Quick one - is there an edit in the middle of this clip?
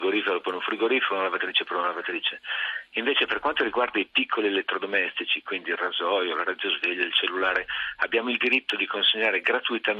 no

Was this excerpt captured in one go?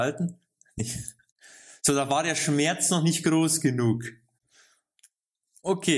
yes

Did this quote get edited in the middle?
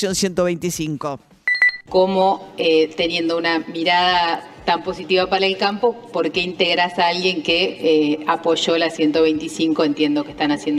no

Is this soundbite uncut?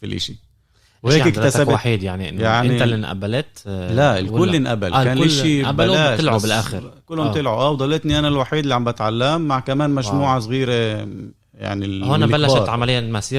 yes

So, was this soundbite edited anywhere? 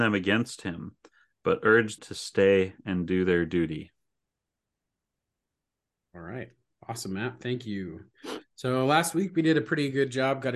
yes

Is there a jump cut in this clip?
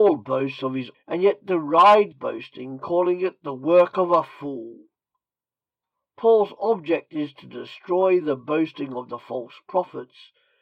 yes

